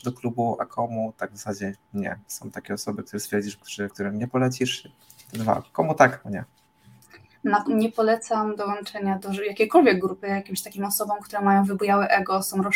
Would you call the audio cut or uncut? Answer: cut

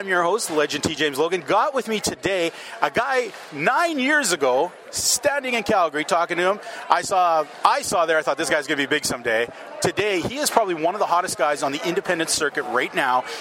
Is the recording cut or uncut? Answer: uncut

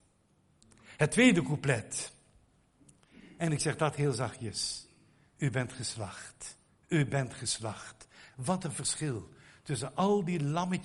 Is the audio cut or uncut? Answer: cut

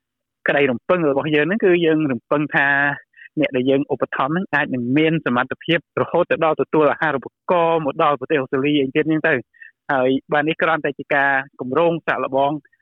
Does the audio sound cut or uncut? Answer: cut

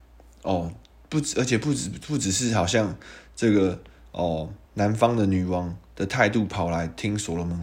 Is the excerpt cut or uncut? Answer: cut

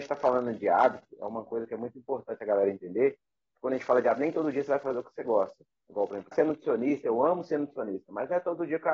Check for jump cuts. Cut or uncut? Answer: cut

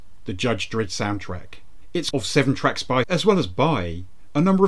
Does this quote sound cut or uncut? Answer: cut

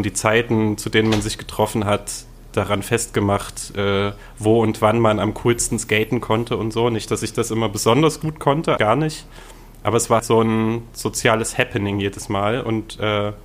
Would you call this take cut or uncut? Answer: cut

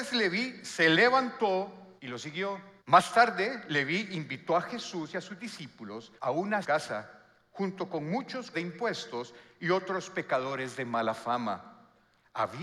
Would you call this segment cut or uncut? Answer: cut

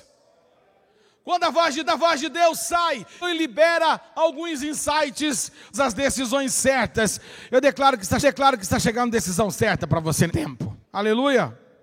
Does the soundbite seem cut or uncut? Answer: cut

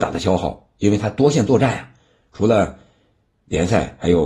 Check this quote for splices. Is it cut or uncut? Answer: uncut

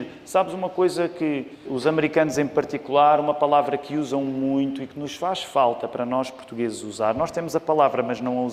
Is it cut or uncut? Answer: cut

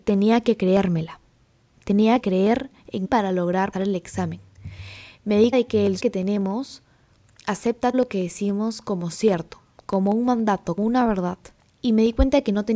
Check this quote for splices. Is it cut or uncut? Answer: cut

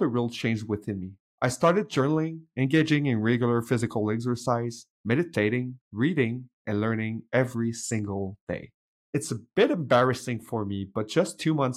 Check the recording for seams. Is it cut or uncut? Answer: uncut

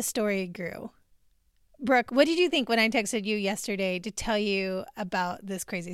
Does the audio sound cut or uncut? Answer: uncut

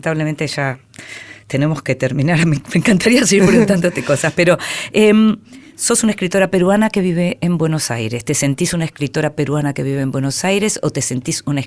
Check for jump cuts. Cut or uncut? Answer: uncut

